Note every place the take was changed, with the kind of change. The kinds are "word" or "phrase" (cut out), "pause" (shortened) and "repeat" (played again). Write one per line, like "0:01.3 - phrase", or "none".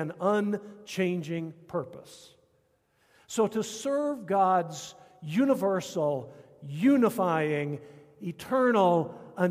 none